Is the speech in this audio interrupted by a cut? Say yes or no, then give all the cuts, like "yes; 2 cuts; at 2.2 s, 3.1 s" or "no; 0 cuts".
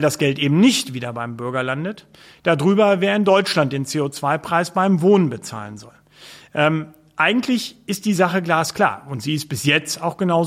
no; 0 cuts